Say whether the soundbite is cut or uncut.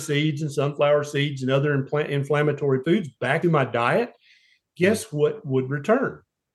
cut